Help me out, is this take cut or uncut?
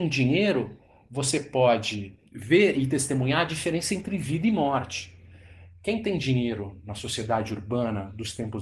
uncut